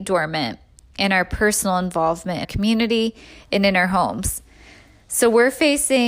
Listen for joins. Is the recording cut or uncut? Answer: cut